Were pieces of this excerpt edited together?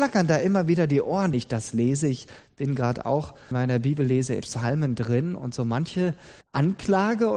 yes; 4 cuts; at 1.3 s, 3.5 s, 4.4 s, 6.4 s

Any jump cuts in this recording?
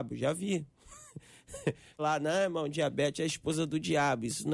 yes; 1 cut; at 2.0 s

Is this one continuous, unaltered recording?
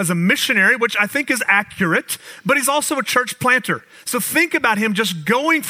yes; 0 cuts

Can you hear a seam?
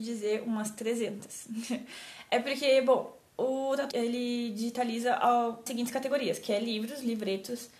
yes; 2 cuts; at 3.9 s, 5.7 s

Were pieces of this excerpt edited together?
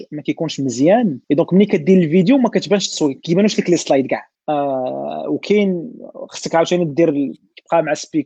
yes; 2 cuts; at 1.2 s, 4.4 s

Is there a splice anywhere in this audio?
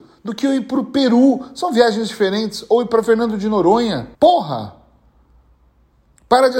yes; 1 cut; at 4.1 s

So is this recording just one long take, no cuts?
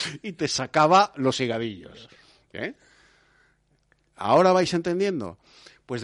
yes; 0 cuts

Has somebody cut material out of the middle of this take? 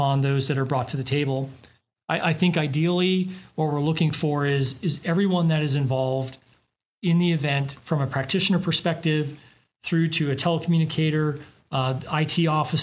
no; 0 cuts

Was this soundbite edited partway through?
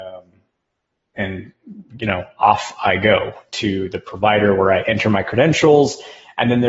no; 0 cuts

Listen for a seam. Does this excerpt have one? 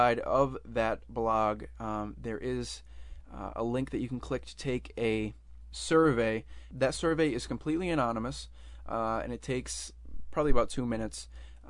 no; 0 cuts

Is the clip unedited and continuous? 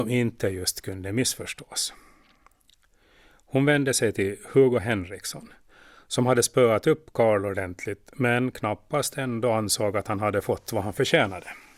yes; 0 cuts

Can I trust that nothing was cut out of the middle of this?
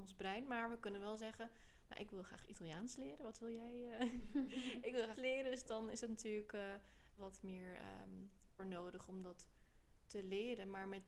no; 3 cuts; at 5.2 s, 7.2 s, 8.6 s

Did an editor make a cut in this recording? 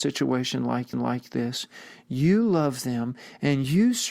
yes; 1 cut; at 0.9 s

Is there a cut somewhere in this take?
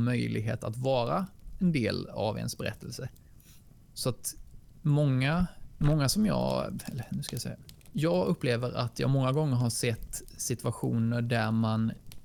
no; 0 cuts

